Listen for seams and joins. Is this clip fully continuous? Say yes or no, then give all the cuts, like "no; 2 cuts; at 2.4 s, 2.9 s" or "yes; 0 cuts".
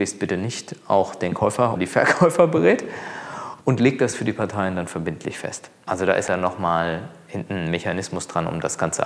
no; 3 cuts; at 1.8 s, 3.6 s, 6.3 s